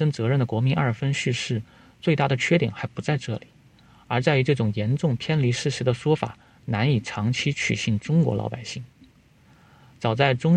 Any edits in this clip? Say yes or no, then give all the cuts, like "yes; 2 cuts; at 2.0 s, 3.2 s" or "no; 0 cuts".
no; 0 cuts